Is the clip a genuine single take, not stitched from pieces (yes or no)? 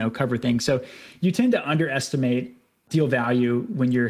yes